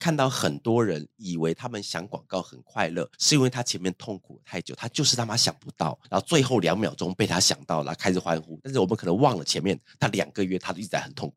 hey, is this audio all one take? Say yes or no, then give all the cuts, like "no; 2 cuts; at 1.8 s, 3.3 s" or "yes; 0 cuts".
no; 2 cuts; at 3.1 s, 6.0 s